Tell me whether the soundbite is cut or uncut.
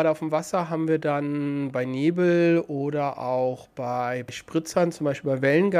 uncut